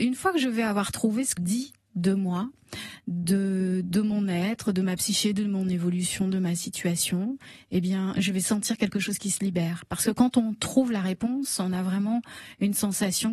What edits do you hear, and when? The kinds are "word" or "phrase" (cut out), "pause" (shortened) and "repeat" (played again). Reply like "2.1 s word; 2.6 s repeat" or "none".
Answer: 1.4 s phrase